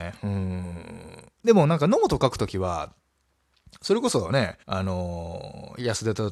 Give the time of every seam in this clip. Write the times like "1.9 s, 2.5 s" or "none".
4.6 s